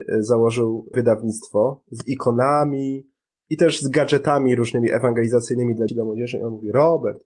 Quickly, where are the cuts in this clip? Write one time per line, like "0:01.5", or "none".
0:00.9
0:05.9